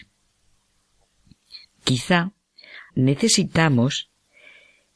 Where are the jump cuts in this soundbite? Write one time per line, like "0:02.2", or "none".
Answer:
0:02.9

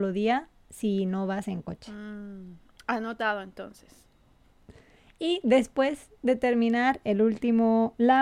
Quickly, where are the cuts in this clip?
none

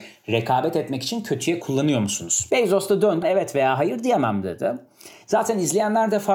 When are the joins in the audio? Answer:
0:03.2

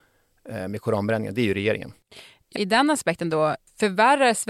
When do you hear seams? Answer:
0:02.5

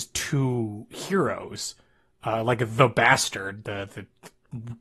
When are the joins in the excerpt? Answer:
none

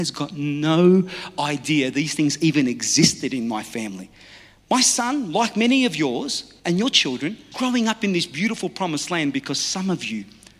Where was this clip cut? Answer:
0:06.6
0:07.5

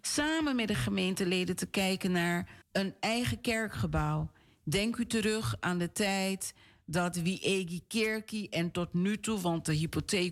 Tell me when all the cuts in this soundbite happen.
0:02.6

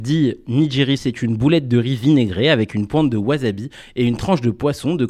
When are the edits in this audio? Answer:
0:01.0

